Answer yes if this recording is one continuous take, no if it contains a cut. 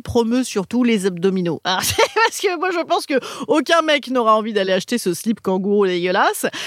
yes